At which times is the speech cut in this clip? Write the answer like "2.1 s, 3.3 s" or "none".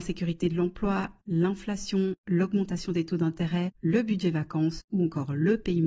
3.8 s